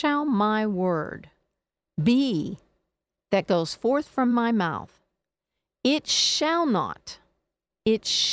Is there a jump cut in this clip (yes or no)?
no